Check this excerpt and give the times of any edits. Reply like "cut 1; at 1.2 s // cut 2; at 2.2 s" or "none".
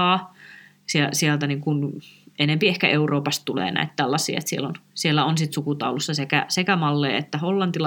none